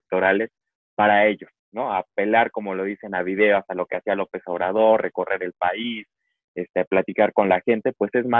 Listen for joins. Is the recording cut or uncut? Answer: uncut